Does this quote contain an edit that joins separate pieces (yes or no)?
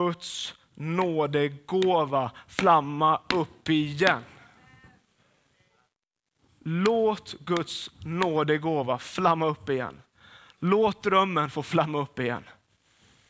no